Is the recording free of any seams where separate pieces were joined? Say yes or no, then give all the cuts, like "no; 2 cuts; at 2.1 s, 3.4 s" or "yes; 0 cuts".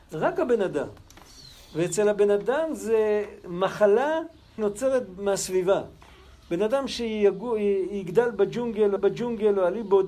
no; 2 cuts; at 4.6 s, 9.0 s